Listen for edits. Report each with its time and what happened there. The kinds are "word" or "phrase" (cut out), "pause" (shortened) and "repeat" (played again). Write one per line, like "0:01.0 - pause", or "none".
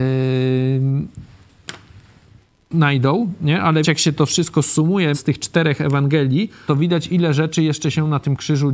0:03.8 - word
0:05.1 - word
0:06.7 - word